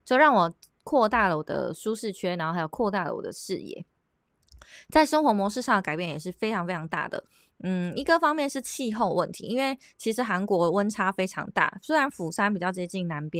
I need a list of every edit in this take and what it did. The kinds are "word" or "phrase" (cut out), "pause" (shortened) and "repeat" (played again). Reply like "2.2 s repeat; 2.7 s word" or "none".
none